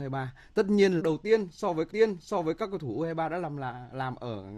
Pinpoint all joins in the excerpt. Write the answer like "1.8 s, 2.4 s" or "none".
1.0 s, 1.9 s